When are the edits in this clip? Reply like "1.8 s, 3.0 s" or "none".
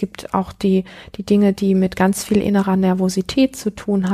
none